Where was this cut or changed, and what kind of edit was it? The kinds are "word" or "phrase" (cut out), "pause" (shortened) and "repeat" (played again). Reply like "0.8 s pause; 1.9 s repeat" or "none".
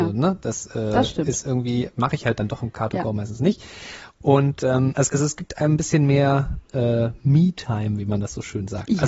5.1 s word